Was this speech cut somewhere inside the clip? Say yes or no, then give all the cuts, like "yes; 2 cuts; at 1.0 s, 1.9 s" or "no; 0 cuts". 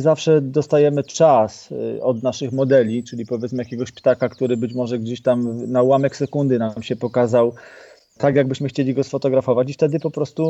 no; 0 cuts